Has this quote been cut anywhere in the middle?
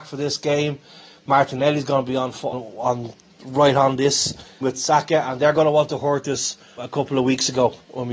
yes; 3 cuts; at 2.5 s, 4.6 s, 6.8 s

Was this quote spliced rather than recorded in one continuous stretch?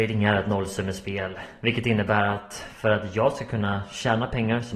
no; 0 cuts

